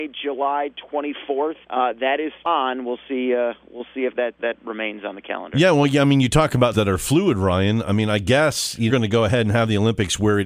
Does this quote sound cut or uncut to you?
cut